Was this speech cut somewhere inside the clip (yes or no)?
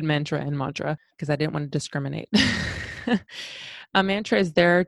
no